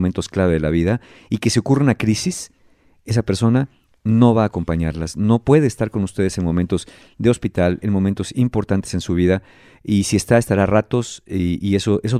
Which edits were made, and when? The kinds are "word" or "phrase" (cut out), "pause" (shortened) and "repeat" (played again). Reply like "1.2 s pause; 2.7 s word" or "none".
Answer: none